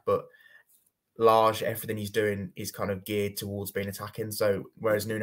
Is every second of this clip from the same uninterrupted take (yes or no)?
yes